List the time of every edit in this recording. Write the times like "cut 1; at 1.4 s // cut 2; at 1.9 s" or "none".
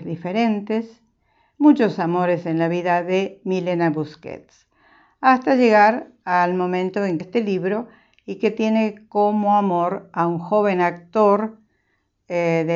cut 1; at 7.2 s